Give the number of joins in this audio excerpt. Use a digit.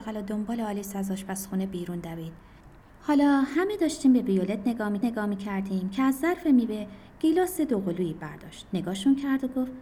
2